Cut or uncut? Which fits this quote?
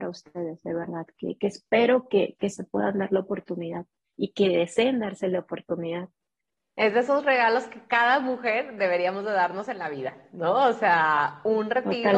uncut